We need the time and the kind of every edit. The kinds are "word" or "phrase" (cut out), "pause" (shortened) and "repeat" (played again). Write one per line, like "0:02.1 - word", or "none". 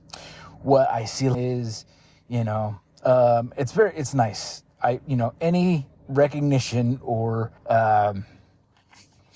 0:01.3 - phrase
0:07.6 - pause